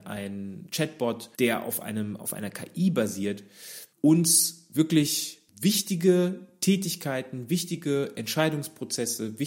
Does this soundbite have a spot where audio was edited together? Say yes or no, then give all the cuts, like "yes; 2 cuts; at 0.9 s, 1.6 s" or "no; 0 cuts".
yes; 3 cuts; at 1.3 s, 3.9 s, 5.5 s